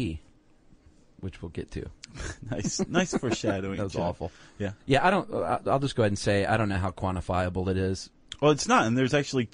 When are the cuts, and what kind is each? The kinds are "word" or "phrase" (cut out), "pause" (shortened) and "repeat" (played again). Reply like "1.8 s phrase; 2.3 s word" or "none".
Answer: 2.0 s pause; 4.8 s pause